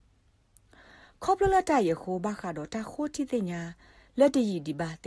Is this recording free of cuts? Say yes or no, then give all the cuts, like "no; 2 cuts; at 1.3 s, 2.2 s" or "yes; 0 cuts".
yes; 0 cuts